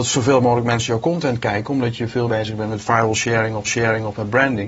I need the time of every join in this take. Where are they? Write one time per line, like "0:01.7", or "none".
0:02.3
0:03.6